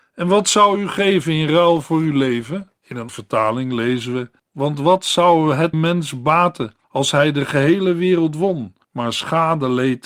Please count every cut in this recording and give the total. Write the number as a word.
six